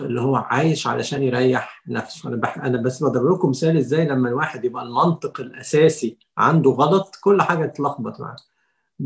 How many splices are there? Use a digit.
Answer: 0